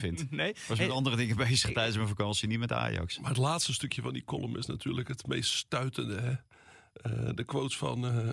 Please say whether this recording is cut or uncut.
uncut